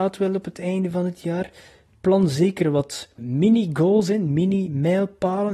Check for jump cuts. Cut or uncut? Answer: uncut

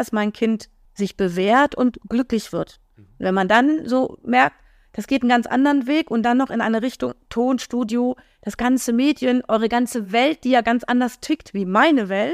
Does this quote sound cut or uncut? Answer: uncut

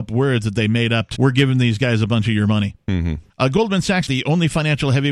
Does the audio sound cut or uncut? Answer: cut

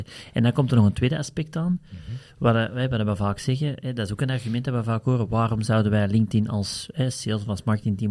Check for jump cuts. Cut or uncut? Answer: uncut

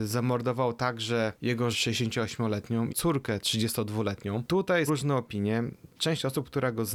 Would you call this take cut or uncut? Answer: cut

